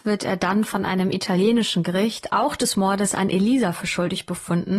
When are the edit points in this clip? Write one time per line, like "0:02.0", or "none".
none